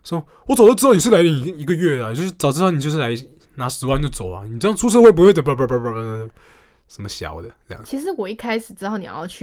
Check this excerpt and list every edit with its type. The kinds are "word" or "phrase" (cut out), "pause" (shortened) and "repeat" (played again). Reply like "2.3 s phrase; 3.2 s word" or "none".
none